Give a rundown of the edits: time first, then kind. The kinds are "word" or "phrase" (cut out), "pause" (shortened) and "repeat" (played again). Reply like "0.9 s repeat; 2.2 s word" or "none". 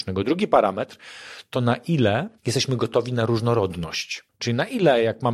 2.4 s pause; 4.3 s pause